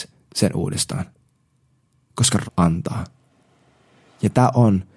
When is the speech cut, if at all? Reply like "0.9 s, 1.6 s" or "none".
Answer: 2.5 s